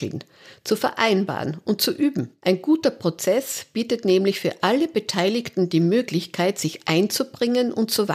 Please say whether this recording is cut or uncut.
cut